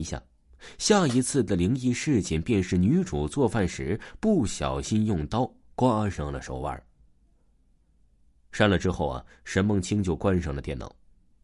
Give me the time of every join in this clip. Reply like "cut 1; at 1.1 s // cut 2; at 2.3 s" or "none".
none